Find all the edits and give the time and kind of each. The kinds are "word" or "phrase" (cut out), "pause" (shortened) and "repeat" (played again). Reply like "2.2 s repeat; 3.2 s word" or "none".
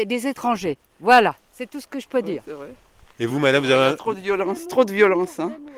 none